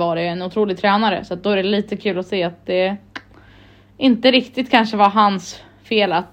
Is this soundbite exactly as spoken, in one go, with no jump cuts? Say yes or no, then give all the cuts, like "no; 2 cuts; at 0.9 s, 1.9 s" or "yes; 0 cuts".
yes; 0 cuts